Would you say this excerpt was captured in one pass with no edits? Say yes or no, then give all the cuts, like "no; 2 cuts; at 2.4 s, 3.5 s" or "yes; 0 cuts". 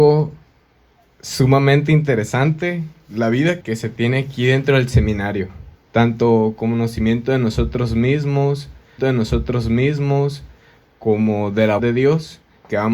no; 4 cuts; at 3.6 s, 5.8 s, 9.0 s, 11.8 s